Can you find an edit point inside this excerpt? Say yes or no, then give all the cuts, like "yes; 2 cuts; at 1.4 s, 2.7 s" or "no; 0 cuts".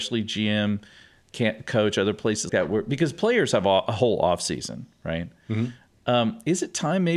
yes; 1 cut; at 2.5 s